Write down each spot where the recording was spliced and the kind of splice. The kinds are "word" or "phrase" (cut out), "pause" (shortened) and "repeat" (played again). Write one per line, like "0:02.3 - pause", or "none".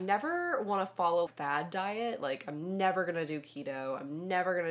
0:01.3 - phrase